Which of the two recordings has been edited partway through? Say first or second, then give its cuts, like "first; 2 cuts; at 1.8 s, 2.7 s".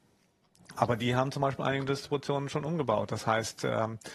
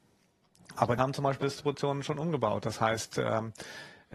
second; 2 cuts; at 1.0 s, 1.4 s